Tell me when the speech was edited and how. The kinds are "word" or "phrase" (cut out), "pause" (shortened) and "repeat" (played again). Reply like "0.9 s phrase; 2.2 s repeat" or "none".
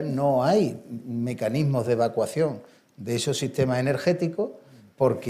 none

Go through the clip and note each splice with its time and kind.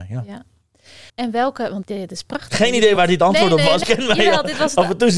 1.1 s pause; 1.8 s word; 3.0 s word; 3.8 s phrase

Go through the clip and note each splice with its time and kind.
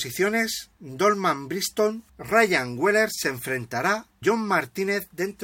2.1 s pause; 4.2 s word

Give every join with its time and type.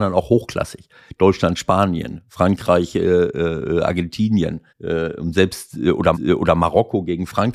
4.7 s pause; 6.1 s repeat

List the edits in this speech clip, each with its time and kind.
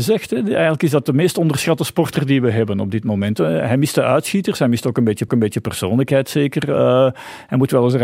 5.3 s repeat

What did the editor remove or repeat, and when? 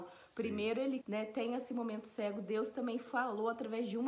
1.0 s phrase

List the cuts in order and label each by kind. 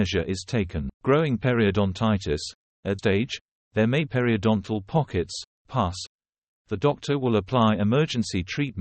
0.9 s pause; 3.0 s word; 4.1 s word

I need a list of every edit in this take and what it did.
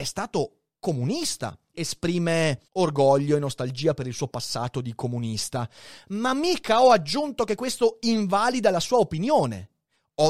1.7 s phrase; 2.7 s pause

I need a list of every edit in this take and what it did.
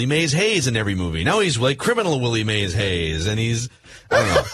none

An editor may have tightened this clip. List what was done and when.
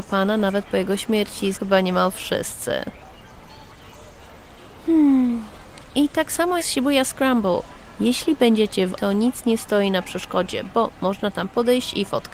1.5 s word; 6.6 s word; 9.0 s word

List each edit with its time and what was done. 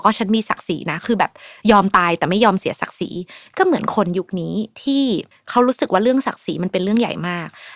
5.3 s pause

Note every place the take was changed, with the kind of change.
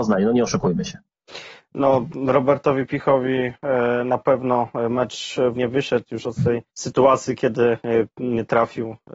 5.6 s word; 6.2 s word; 6.7 s pause

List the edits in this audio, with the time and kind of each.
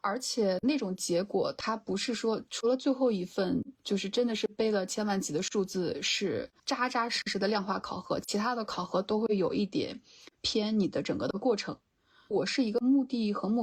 3.7 s pause; 6.6 s pause

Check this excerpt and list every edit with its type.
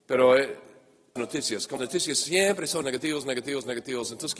1.2 s phrase; 1.8 s word; 2.8 s word

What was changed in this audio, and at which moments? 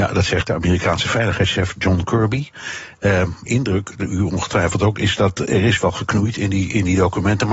3.5 s phrase

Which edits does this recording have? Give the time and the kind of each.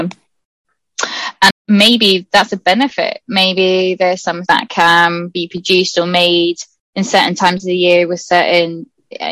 1.5 s word; 4.5 s word

